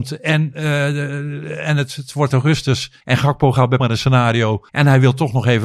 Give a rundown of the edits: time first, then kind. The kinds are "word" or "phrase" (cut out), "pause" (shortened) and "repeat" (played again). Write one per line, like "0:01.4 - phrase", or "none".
0:02.3 - word
0:03.0 - pause
0:03.8 - phrase
0:04.7 - pause